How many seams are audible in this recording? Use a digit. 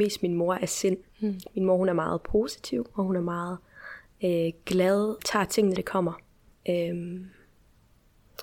4